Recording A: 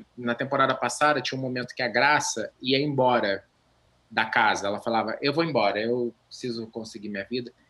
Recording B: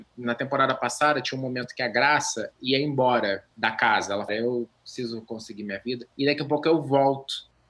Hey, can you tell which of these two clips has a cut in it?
B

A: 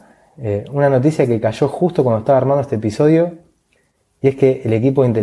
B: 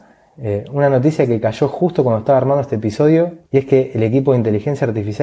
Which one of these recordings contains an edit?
B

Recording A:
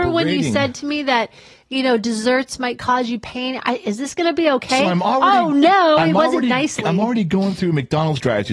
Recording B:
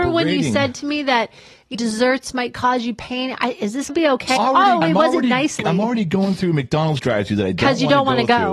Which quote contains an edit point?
B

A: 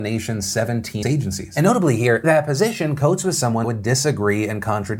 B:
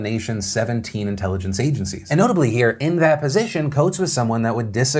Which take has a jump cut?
A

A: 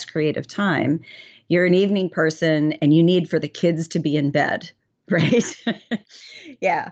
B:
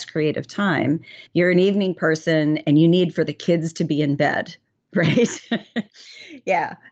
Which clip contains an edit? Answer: B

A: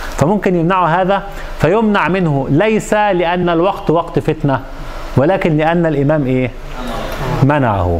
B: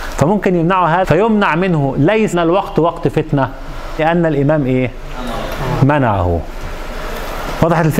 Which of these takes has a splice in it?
B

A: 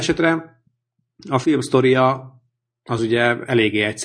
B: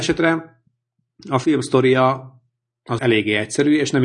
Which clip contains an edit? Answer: B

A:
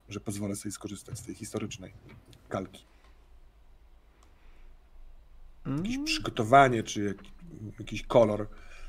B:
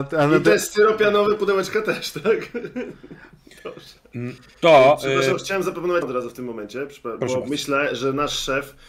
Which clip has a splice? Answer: B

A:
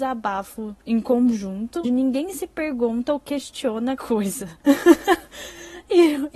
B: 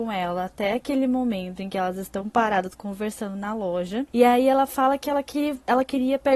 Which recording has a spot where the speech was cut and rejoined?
A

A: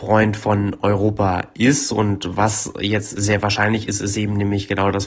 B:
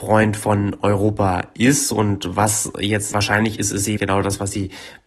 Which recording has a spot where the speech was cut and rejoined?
B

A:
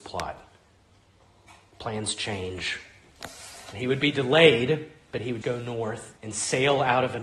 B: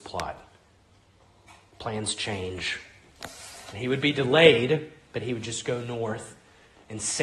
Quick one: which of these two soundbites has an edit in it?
A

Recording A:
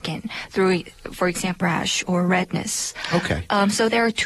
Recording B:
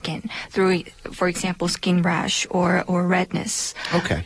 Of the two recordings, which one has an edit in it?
A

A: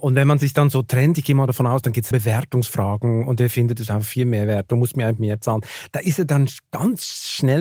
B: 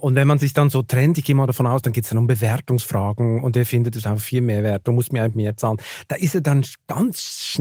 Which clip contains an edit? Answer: A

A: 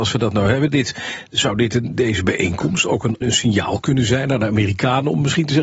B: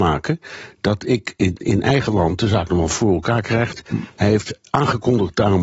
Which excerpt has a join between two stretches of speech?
A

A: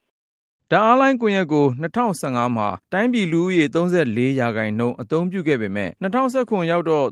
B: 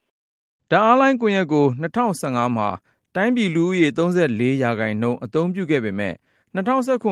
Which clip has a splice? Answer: A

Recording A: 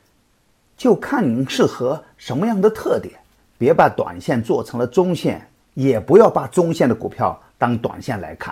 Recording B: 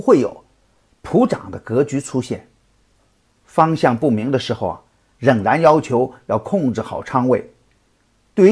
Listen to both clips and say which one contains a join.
A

